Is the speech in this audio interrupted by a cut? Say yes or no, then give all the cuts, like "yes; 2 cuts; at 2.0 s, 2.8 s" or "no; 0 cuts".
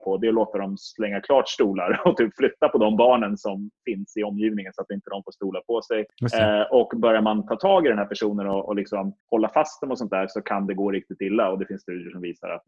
yes; 2 cuts; at 6.1 s, 9.2 s